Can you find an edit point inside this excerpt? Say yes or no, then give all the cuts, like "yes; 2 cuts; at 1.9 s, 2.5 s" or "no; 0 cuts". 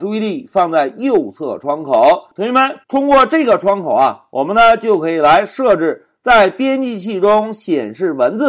yes; 1 cut; at 2.8 s